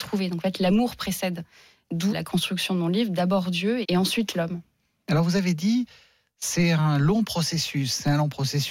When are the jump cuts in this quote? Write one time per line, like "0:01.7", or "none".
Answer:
0:02.1
0:03.8